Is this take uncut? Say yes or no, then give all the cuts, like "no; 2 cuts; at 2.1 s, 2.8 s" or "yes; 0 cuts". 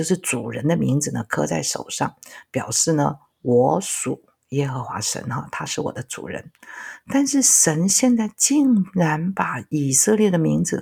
yes; 0 cuts